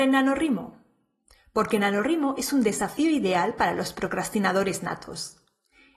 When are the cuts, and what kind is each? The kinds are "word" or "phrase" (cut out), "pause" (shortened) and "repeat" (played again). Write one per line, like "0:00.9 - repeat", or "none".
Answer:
none